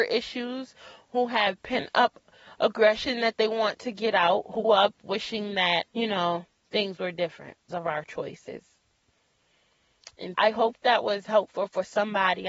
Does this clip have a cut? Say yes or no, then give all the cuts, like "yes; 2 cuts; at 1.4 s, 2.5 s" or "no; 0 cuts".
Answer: yes; 4 cuts; at 4.6 s, 5.9 s, 7.7 s, 10.3 s